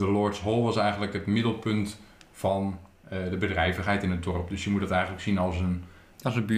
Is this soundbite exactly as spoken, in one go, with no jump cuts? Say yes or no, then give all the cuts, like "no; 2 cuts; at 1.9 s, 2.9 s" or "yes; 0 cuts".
yes; 0 cuts